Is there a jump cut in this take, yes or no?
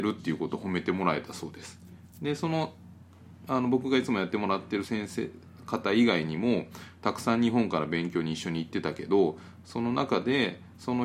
yes